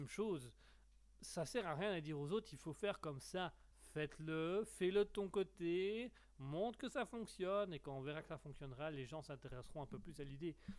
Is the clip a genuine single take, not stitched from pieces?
no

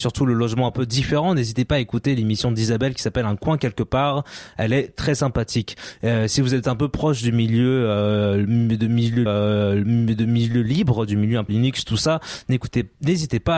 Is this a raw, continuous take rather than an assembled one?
no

